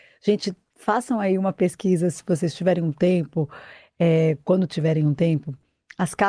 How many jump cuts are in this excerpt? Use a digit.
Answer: 0